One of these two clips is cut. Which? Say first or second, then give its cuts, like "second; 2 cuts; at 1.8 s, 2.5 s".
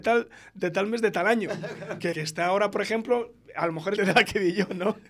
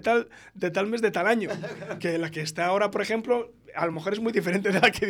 first; 2 cuts; at 2.1 s, 4.0 s